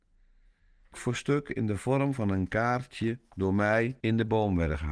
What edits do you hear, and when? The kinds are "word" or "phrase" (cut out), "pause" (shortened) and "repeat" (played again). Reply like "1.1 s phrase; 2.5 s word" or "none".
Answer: 0.9 s word; 4.0 s pause